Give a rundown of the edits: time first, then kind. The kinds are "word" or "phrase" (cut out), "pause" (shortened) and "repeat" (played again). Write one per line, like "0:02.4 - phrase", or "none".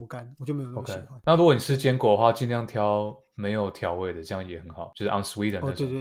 none